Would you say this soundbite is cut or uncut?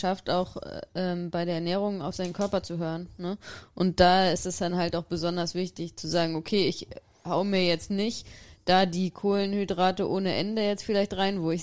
uncut